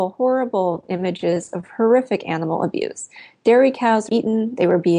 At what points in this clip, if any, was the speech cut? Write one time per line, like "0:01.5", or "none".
0:04.1